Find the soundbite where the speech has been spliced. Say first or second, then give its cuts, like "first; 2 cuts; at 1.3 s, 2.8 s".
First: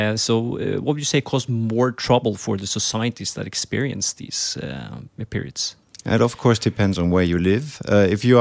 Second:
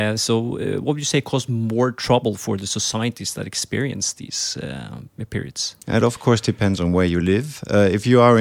second; 1 cut; at 5.8 s